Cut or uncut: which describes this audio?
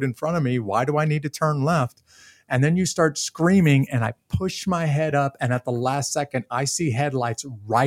uncut